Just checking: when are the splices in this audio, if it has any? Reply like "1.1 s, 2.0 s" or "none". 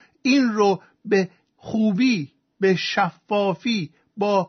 none